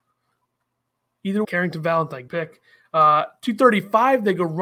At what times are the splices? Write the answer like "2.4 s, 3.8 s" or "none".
1.4 s, 2.3 s

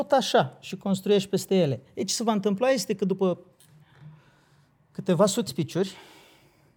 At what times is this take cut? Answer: 5.5 s

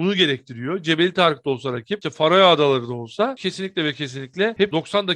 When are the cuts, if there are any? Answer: none

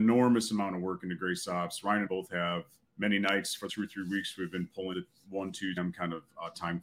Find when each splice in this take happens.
2.1 s, 2.9 s, 3.7 s, 4.9 s, 5.8 s

